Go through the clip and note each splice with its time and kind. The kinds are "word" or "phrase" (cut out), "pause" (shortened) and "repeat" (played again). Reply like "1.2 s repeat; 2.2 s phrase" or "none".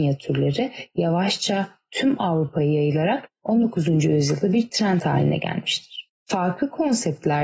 3.4 s pause